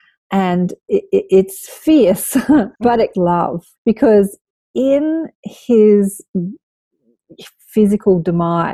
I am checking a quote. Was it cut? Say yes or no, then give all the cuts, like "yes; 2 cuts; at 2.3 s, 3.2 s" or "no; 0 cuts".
yes; 3 cuts; at 2.7 s, 3.1 s, 3.8 s